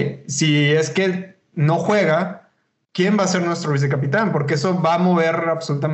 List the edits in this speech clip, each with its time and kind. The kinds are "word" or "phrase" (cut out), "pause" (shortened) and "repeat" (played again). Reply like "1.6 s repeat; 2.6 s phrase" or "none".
none